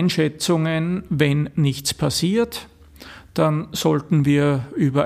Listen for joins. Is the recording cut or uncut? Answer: uncut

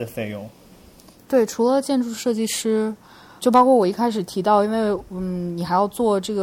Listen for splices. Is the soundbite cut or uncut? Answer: cut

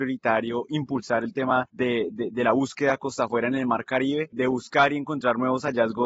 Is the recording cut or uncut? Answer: uncut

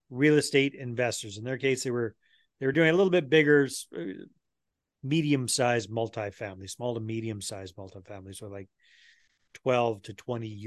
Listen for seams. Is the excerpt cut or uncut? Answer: uncut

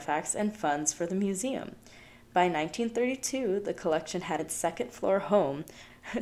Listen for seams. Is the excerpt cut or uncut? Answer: cut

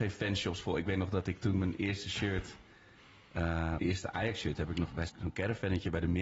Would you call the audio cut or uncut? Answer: cut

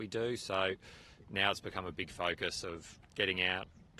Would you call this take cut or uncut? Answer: uncut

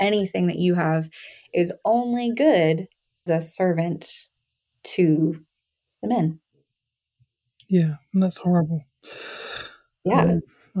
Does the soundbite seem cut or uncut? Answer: cut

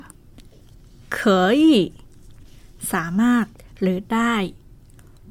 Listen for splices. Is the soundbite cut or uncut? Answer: uncut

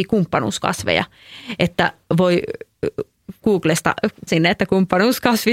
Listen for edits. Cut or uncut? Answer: cut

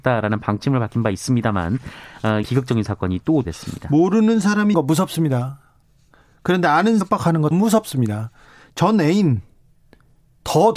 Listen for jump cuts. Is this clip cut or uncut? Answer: cut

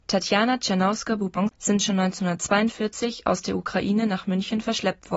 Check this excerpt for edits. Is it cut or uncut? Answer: cut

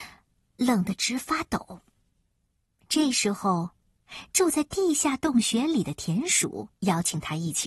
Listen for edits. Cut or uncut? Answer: cut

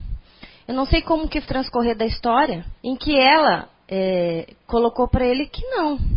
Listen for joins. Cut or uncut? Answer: cut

